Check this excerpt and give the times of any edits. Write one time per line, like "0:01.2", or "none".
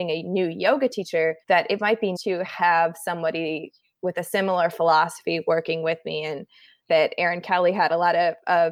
0:01.4
0:02.2
0:06.9